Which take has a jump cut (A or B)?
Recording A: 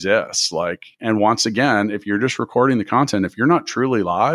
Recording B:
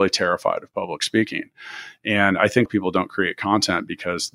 B